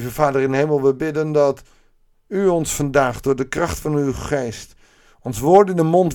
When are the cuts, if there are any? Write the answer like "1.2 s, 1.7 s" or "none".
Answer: none